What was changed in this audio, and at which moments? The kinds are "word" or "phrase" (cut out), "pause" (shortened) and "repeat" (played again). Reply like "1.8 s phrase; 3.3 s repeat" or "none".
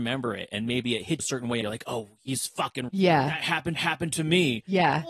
1.2 s word; 1.6 s word; 2.9 s word; 3.8 s repeat